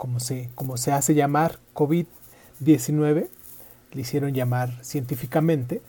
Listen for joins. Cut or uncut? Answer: uncut